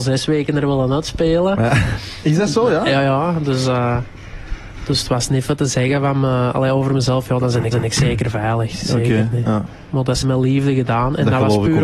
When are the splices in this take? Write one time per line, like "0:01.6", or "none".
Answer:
0:07.7
0:10.2